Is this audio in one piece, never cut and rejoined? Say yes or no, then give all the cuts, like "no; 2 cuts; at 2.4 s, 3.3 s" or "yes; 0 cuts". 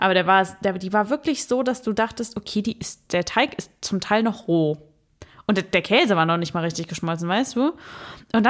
yes; 0 cuts